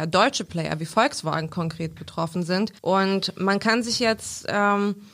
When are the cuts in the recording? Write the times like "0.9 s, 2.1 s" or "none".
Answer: 2.8 s

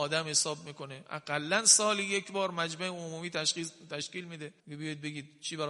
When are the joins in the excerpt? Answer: 4.6 s

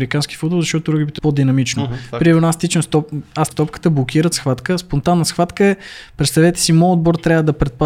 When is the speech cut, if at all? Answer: 1.2 s, 3.5 s, 4.3 s

